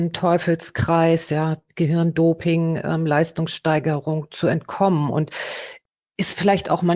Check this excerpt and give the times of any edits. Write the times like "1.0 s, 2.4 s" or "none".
none